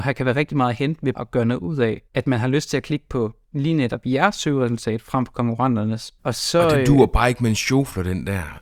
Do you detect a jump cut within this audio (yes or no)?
yes